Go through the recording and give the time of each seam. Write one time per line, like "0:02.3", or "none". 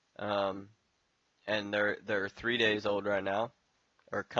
none